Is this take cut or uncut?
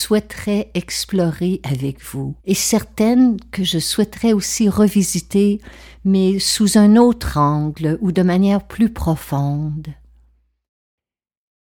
cut